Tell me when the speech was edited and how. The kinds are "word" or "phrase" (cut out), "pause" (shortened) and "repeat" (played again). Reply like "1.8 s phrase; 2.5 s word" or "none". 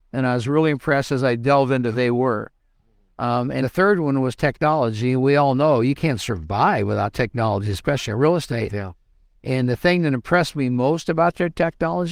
1.9 s word; 3.6 s word